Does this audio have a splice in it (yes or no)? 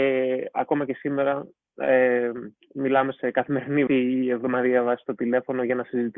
yes